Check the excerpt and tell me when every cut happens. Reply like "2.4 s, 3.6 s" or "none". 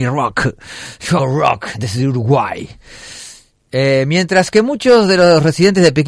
1.2 s